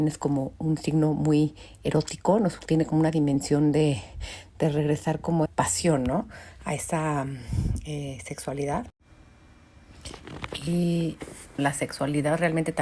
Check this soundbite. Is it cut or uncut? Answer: cut